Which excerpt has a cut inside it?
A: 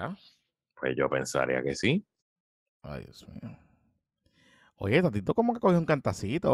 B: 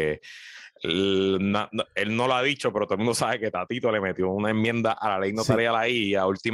A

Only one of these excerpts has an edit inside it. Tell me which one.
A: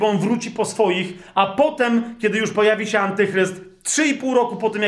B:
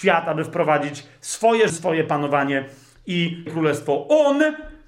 B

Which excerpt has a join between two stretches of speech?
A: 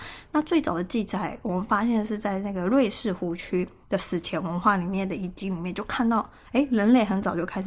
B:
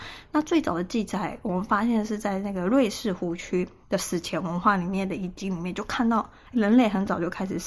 B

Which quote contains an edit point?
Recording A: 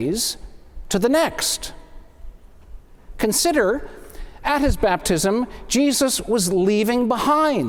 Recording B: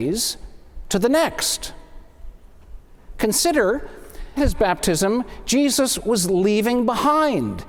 B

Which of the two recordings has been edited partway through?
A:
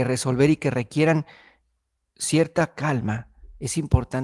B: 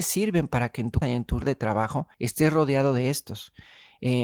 B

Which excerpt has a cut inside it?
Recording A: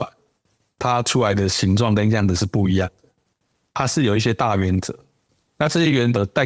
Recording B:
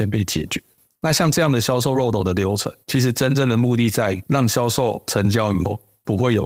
B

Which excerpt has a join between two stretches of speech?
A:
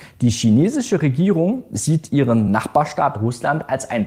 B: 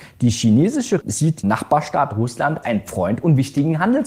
B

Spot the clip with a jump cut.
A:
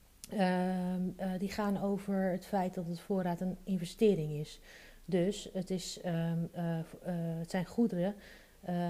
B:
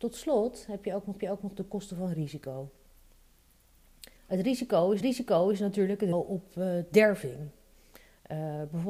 B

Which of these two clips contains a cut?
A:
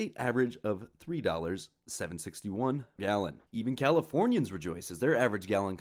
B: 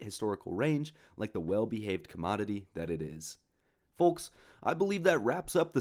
A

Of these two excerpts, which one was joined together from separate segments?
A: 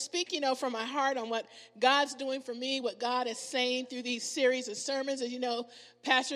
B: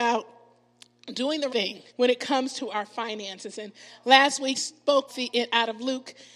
B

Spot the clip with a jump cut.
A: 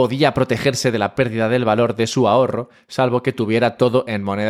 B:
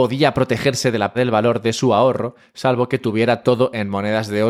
B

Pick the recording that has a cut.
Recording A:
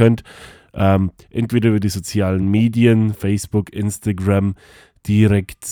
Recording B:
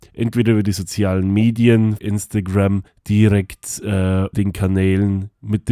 B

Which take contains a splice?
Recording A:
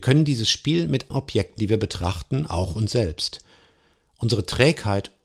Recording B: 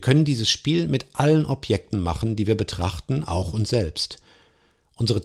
A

